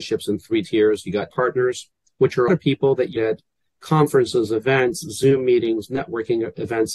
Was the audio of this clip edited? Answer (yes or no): yes